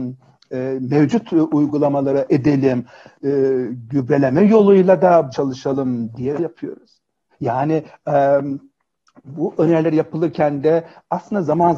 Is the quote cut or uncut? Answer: cut